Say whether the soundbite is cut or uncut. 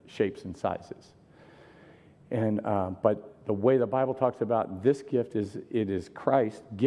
uncut